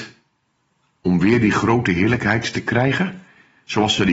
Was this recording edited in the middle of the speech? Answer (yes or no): no